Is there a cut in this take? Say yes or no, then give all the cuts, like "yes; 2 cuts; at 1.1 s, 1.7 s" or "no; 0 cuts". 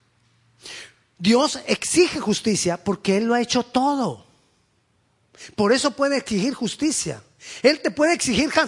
no; 0 cuts